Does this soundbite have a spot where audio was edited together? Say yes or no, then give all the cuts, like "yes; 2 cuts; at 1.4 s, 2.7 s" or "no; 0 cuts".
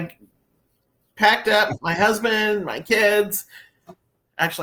no; 0 cuts